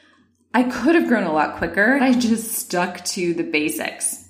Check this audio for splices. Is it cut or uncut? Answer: cut